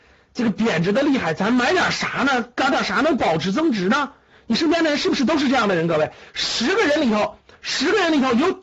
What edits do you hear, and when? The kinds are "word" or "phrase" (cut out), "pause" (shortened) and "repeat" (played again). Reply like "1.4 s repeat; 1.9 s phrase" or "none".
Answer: none